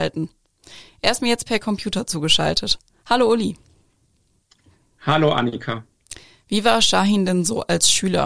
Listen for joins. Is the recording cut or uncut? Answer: uncut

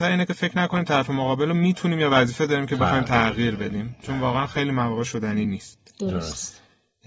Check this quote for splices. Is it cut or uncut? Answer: uncut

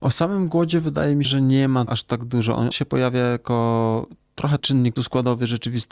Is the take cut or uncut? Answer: cut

